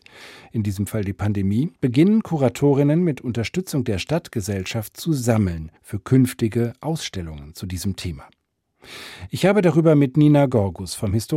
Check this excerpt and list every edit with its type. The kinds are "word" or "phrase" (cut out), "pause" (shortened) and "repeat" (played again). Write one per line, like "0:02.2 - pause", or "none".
0:01.8 - pause
0:05.8 - pause